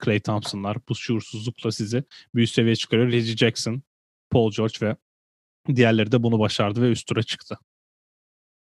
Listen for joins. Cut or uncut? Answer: uncut